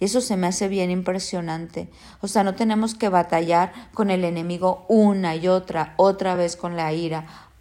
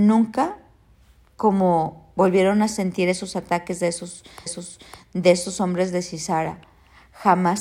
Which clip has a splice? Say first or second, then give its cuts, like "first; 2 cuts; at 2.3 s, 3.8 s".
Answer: second; 1 cut; at 4.5 s